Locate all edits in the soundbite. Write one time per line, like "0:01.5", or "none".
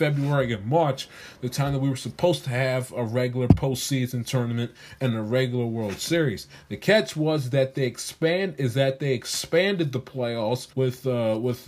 0:10.7